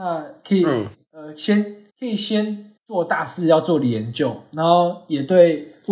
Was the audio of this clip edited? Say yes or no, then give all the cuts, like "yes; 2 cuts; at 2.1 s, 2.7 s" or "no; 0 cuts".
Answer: yes; 2 cuts; at 1.9 s, 2.8 s